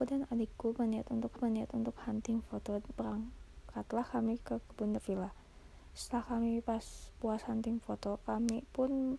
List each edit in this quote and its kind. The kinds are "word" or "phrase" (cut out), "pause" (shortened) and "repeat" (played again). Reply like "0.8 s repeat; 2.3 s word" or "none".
1.4 s repeat; 3.0 s word; 5.0 s word